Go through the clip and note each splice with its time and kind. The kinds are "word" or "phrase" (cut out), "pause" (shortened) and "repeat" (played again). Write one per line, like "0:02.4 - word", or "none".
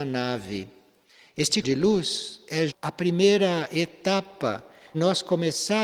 0:01.6 - word
0:02.7 - word
0:04.9 - word